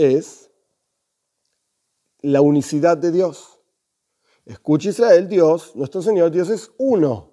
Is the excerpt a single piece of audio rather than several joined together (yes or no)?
yes